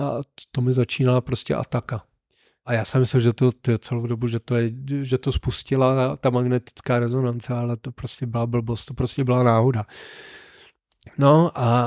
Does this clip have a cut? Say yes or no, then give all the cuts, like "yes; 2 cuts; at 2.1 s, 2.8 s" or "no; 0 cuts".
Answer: no; 0 cuts